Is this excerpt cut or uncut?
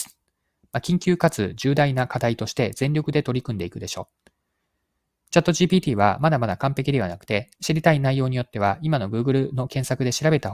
uncut